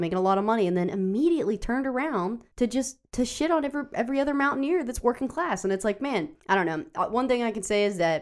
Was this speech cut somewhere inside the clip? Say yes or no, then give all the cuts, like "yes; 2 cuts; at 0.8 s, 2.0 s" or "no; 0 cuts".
yes; 2 cuts; at 2.5 s, 6.4 s